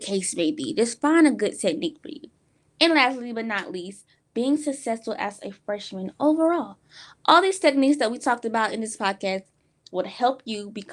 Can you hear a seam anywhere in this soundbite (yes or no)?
no